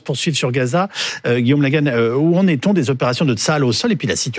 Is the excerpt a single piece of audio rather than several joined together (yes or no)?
yes